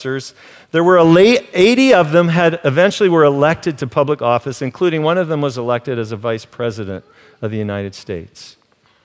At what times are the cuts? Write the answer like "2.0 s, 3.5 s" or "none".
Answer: none